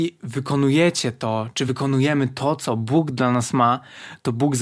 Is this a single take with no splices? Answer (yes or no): yes